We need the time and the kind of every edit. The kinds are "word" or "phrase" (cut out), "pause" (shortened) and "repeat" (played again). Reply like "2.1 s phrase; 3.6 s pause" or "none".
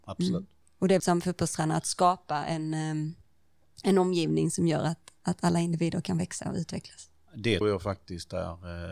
1.0 s phrase; 7.6 s word

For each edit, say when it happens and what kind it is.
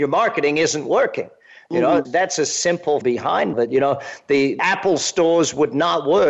2.0 s word; 3.0 s word; 3.5 s word; 4.6 s word

